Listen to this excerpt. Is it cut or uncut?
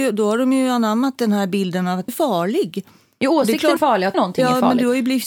cut